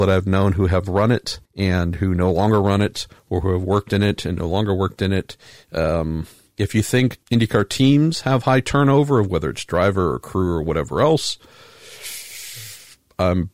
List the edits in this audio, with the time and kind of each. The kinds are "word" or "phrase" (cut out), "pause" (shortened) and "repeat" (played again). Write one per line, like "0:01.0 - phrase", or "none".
0:01.5 - pause
0:07.2 - pause